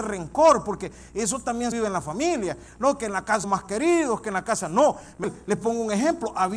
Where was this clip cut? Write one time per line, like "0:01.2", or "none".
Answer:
0:01.7
0:03.4
0:05.2